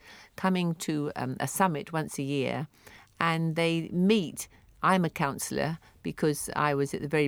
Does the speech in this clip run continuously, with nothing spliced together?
yes; 0 cuts

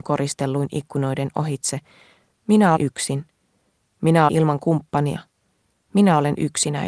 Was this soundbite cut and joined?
yes; 2 cuts; at 2.8 s, 4.3 s

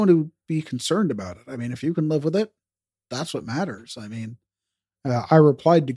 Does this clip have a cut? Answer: no; 0 cuts

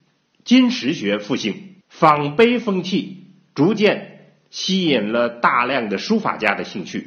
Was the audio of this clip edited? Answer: yes; 1 cut; at 1.8 s

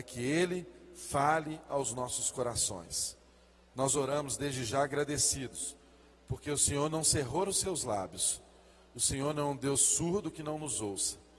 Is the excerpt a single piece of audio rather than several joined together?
yes; 0 cuts

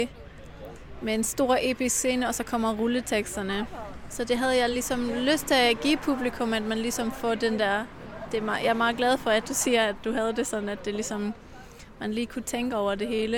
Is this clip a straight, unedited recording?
yes; 0 cuts

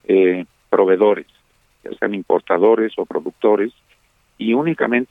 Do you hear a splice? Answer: no; 0 cuts

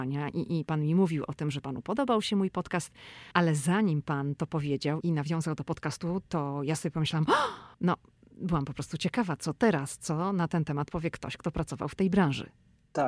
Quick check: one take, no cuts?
no; 2 cuts; at 3.3 s, 7.7 s

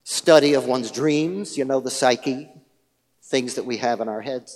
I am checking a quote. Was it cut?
no; 0 cuts

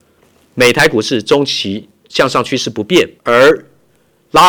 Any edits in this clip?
yes; 1 cut; at 3.2 s

